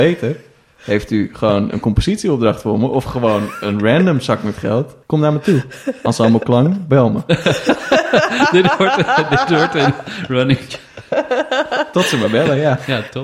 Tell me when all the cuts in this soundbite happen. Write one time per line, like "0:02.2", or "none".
0:05.0